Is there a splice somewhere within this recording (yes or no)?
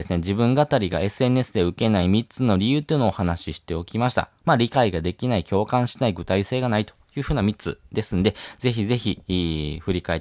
no